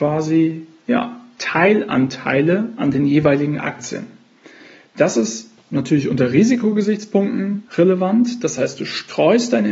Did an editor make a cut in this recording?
yes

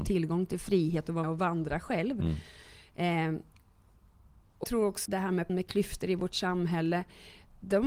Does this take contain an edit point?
yes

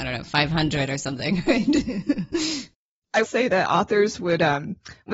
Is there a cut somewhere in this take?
yes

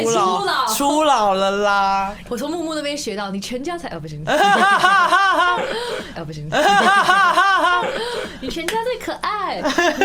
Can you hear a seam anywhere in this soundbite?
yes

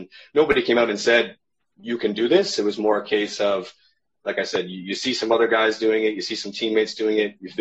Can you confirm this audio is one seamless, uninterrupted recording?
yes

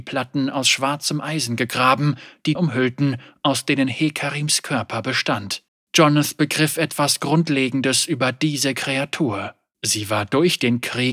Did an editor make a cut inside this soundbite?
yes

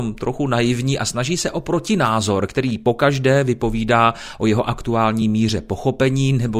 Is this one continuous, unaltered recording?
yes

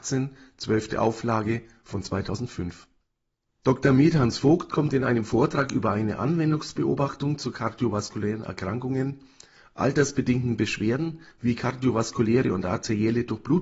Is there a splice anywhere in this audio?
no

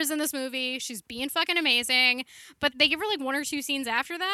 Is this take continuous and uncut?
no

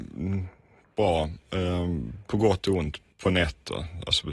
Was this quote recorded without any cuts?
no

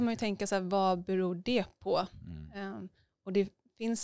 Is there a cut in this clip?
no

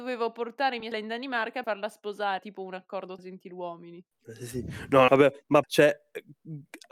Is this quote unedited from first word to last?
no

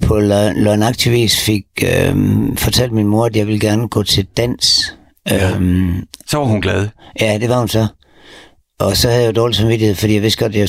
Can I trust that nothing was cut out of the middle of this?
yes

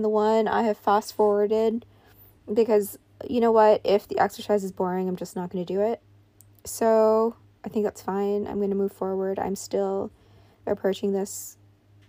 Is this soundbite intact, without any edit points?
yes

